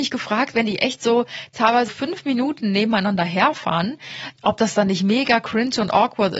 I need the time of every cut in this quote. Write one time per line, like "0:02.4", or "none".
0:01.9
0:04.4